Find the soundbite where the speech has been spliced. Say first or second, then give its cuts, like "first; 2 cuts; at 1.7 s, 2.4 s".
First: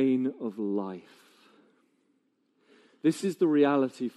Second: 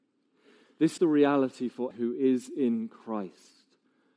second; 2 cuts; at 1.0 s, 1.9 s